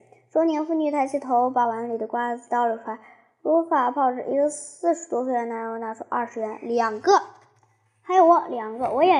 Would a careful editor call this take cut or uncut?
uncut